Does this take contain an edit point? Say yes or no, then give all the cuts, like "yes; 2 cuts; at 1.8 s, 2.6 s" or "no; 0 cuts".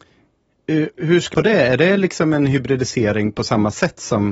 yes; 2 cuts; at 1.0 s, 1.3 s